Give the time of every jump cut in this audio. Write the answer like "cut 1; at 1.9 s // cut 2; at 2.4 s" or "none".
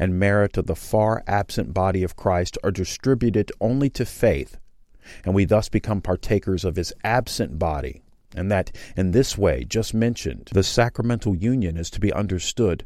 none